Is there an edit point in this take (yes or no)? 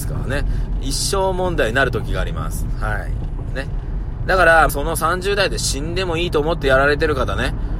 yes